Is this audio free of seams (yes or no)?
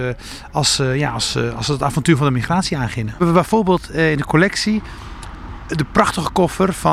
yes